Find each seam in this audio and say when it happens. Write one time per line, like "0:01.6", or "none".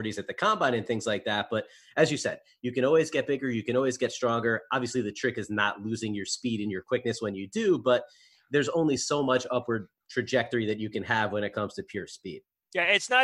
none